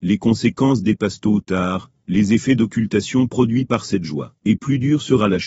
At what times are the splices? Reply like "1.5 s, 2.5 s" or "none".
4.4 s